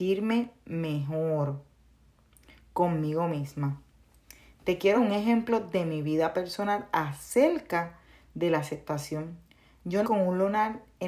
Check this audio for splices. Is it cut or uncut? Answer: cut